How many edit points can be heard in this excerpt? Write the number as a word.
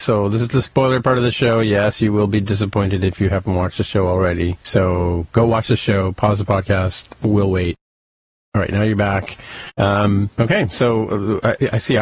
zero